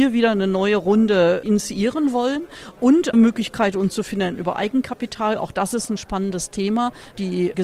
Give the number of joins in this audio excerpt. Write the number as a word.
one